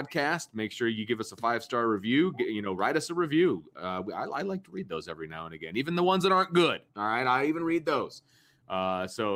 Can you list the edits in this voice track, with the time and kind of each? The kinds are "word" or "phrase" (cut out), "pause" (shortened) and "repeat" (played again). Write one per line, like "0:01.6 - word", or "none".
0:06.9 - pause